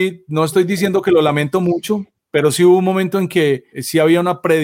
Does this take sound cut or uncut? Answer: cut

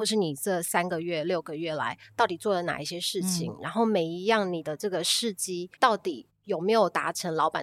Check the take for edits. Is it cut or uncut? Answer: cut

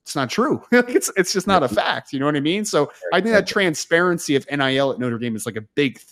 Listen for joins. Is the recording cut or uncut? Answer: uncut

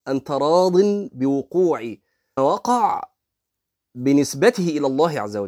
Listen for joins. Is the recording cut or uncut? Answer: cut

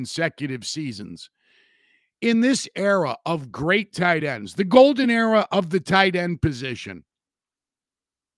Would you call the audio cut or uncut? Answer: uncut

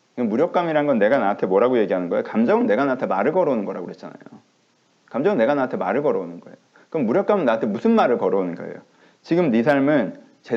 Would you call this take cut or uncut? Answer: uncut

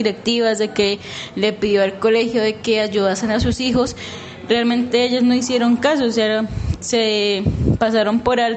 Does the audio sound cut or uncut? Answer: uncut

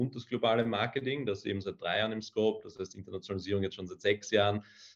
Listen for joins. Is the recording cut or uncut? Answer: uncut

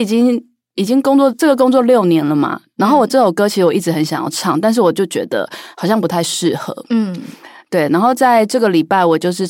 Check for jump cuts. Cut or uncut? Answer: uncut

